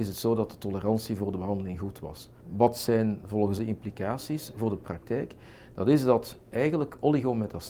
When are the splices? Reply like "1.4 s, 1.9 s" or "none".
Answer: 2.4 s, 3.6 s, 6.4 s